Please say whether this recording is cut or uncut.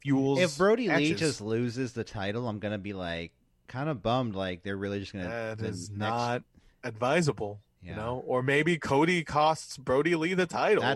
uncut